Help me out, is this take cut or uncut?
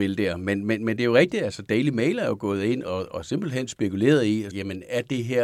cut